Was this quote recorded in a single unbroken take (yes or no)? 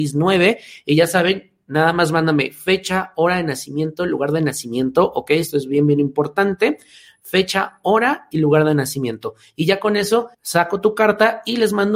no